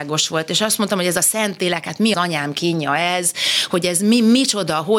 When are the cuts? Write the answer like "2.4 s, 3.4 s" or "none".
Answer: 2.1 s

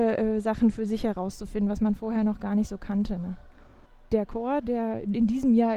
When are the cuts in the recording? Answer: none

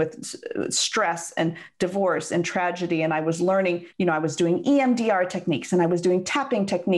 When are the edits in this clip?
3.9 s

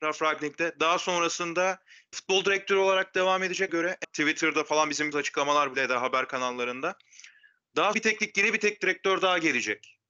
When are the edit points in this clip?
2.1 s, 3.7 s, 4.0 s, 5.1 s, 5.7 s, 7.9 s

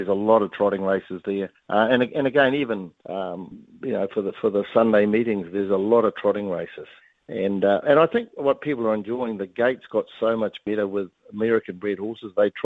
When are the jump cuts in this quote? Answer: 1.5 s, 3.0 s, 7.0 s

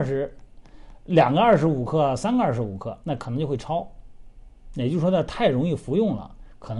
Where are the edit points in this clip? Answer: 3.0 s

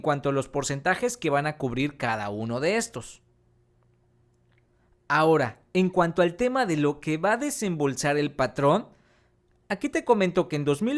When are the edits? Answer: none

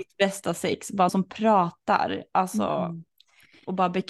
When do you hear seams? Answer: 1.1 s

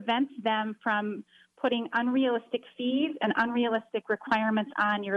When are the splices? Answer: none

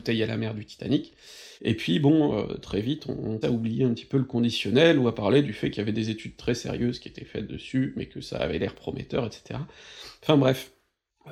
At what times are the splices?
1.6 s, 3.4 s

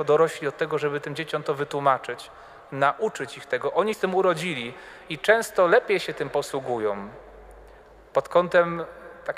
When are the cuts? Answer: 3.9 s

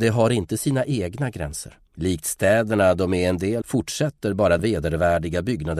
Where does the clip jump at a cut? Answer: 1.9 s, 3.6 s, 4.6 s

